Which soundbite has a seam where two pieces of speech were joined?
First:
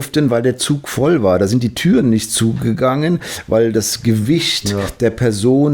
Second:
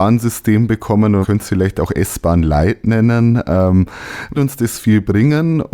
second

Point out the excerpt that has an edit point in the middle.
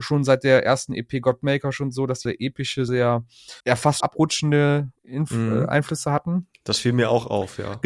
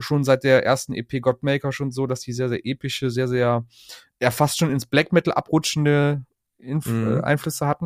first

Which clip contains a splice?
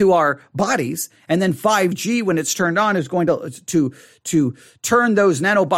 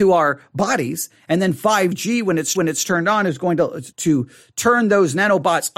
second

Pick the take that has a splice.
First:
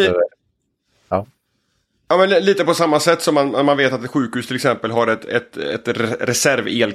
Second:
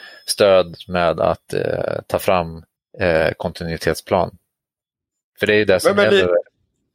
second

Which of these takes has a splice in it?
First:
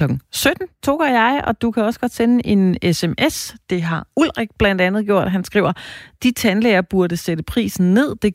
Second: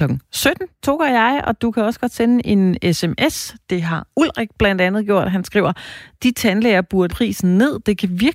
second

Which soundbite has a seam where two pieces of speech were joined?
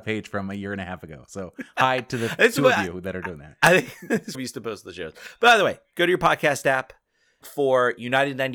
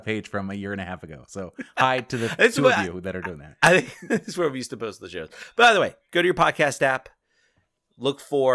first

